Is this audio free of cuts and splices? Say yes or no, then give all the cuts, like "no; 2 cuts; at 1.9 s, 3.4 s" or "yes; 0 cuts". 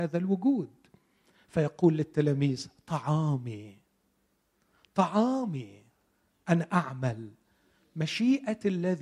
yes; 0 cuts